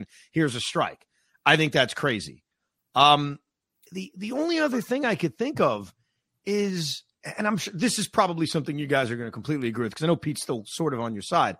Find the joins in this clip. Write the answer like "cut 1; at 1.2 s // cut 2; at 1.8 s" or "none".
none